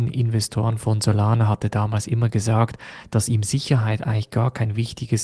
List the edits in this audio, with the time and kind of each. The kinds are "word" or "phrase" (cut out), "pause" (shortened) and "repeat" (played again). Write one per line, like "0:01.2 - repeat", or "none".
none

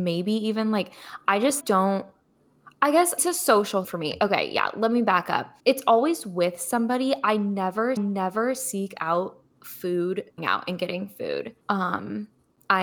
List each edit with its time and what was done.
0:01.6 - word
0:03.2 - phrase
0:03.8 - word
0:05.6 - pause
0:08.0 - repeat
0:10.4 - phrase
0:11.6 - pause

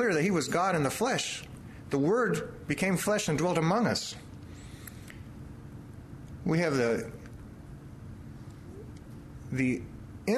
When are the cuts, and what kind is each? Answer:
none

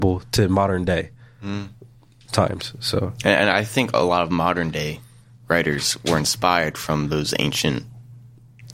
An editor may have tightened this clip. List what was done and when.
none

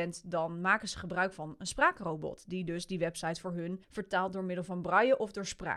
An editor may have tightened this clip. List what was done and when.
0:03.8 - pause

